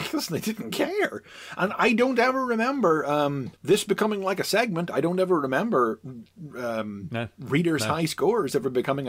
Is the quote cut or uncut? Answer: cut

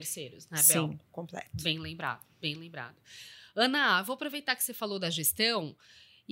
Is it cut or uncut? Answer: cut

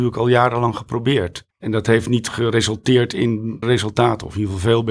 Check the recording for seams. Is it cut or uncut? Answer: cut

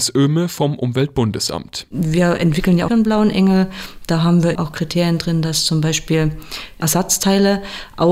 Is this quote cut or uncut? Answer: cut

